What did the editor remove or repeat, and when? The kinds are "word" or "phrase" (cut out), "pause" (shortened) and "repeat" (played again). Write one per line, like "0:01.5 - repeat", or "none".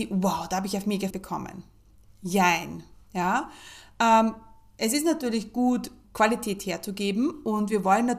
0:01.1 - word
0:06.0 - word